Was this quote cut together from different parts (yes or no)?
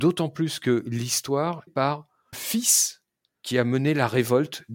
yes